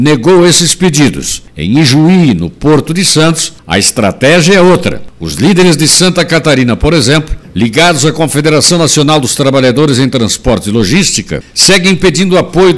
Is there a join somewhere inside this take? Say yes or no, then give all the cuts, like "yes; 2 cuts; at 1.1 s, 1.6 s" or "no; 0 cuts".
no; 0 cuts